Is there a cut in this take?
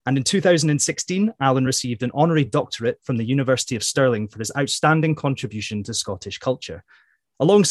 no; 0 cuts

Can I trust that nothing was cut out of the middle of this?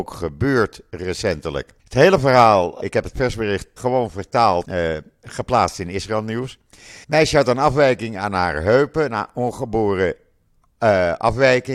no; 5 cuts; at 1.8 s, 2.8 s, 3.8 s, 4.6 s, 7.0 s

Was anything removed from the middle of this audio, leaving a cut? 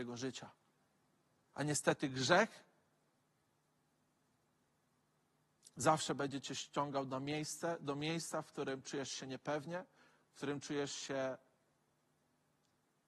no; 0 cuts

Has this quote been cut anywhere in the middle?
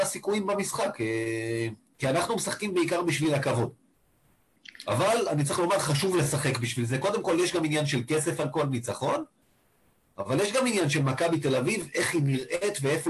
no; 0 cuts

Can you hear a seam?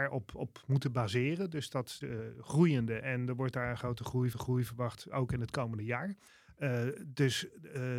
yes; 4 cuts; at 2.0 s, 3.0 s, 4.3 s, 6.3 s

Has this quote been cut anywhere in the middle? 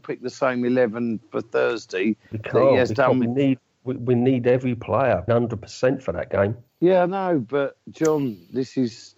yes; 3 cuts; at 5.3 s, 6.7 s, 7.8 s

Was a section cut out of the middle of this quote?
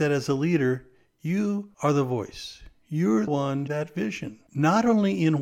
yes; 4 cuts; at 1.7 s, 3.3 s, 3.7 s, 4.5 s

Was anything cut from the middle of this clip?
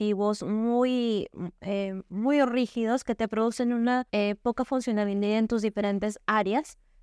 yes; 1 cut; at 4.1 s

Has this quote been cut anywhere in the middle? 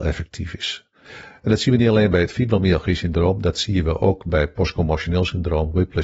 no; 0 cuts

